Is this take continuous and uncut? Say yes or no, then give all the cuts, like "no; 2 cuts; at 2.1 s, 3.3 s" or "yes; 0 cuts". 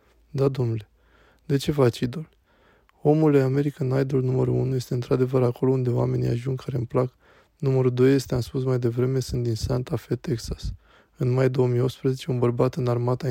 yes; 0 cuts